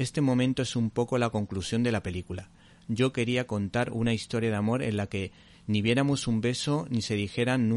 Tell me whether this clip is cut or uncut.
uncut